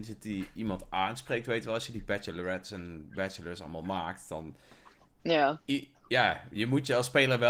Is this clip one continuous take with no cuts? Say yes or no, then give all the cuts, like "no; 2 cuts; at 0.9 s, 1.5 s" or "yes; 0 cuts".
yes; 0 cuts